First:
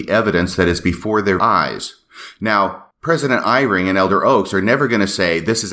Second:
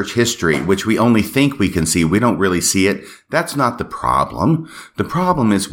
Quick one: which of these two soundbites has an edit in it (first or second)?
first